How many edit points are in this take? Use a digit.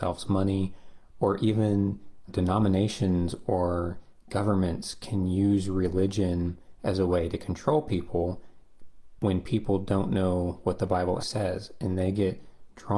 2